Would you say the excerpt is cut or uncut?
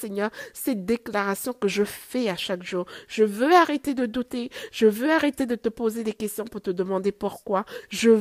uncut